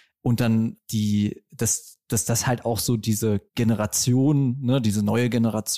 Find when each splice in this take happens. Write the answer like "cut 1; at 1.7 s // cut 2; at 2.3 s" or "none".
cut 1; at 3.5 s